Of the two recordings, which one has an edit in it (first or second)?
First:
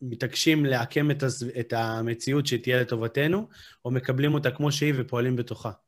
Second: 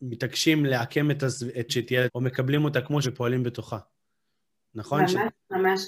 second